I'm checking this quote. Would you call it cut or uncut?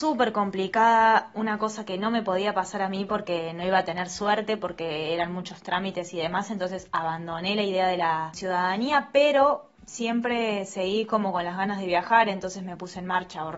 cut